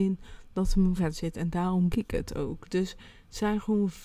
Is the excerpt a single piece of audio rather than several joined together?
no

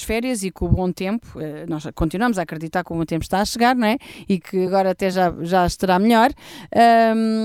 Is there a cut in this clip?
no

